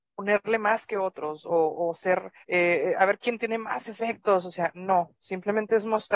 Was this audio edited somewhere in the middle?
yes; 1 cut; at 2.4 s

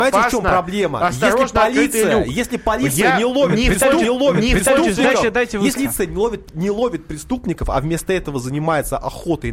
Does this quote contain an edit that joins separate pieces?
yes; 2 cuts; at 4.0 s, 5.8 s

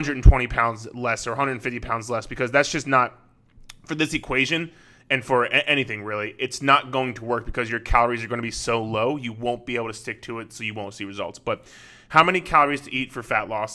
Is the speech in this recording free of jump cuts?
yes; 0 cuts

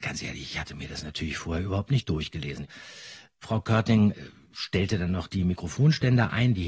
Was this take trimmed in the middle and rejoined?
no; 0 cuts

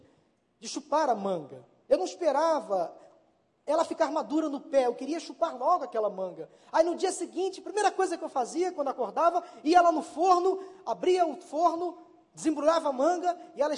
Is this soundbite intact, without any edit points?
yes; 0 cuts

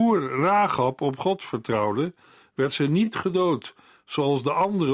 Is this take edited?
no; 0 cuts

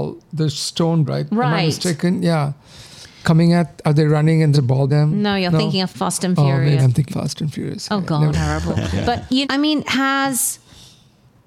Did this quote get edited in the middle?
yes; 9 cuts; at 1.1 s, 4.5 s, 4.9 s, 5.9 s, 6.8 s, 7.1 s, 8.3 s, 9.4 s, 9.8 s

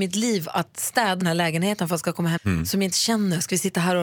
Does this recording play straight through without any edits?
no; 3 cuts; at 1.2 s, 2.4 s, 2.9 s

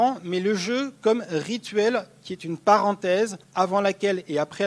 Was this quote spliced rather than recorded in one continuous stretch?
yes; 1 cut; at 3.4 s

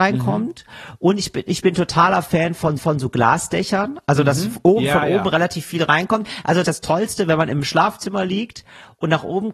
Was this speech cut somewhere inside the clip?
yes; 2 cuts; at 2.8 s, 6.6 s

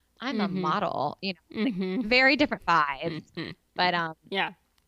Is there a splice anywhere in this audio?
no; 0 cuts

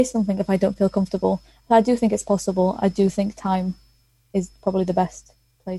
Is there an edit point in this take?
no; 0 cuts

